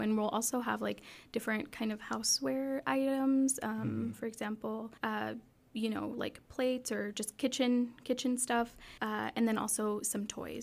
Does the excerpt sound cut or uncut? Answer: cut